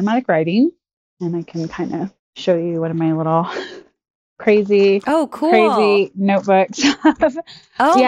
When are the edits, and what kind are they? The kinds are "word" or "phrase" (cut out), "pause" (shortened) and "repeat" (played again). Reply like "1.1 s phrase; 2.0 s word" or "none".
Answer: none